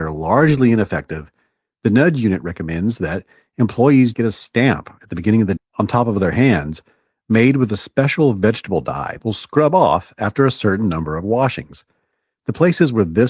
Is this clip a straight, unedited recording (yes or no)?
no